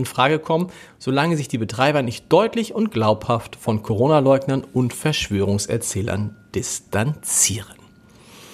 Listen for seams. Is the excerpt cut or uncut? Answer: uncut